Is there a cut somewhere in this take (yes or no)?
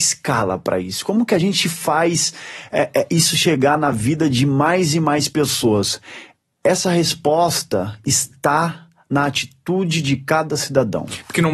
no